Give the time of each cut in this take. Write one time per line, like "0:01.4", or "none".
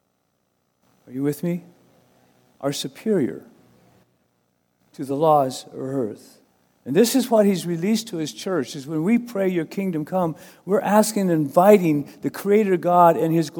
none